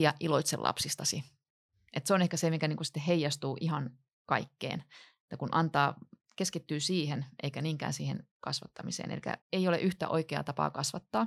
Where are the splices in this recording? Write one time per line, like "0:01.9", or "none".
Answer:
0:09.4